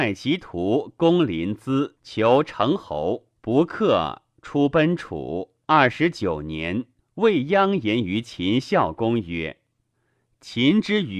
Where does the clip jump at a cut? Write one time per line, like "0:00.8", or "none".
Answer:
0:02.0
0:03.4
0:05.6
0:07.0